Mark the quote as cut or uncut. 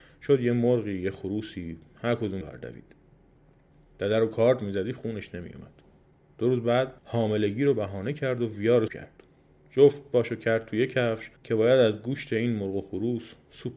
cut